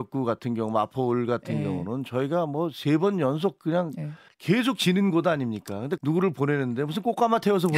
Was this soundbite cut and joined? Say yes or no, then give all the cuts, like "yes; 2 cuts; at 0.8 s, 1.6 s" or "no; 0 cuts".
yes; 2 cuts; at 4.3 s, 6.0 s